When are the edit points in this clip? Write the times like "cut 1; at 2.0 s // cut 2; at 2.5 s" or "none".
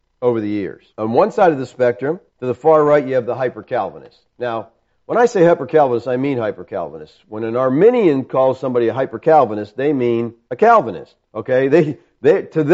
cut 1; at 0.9 s // cut 2; at 2.3 s // cut 3; at 4.9 s // cut 4; at 10.4 s // cut 5; at 11.3 s